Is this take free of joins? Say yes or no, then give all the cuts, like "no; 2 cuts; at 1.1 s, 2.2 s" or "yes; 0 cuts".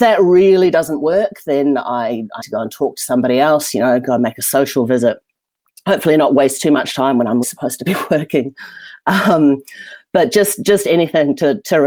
no; 2 cuts; at 2.4 s, 7.4 s